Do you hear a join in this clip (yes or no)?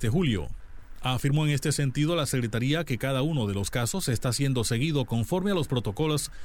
no